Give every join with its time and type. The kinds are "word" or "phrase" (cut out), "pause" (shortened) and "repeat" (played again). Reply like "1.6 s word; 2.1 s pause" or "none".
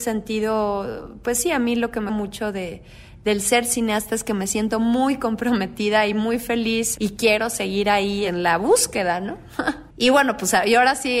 2.1 s word; 9.9 s pause